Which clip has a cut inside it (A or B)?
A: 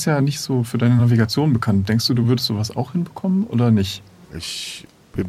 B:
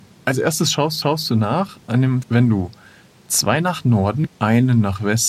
B